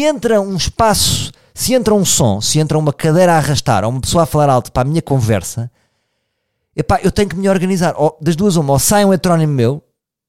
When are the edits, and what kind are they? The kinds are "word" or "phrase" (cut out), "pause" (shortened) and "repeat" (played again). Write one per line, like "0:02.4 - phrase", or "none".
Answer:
none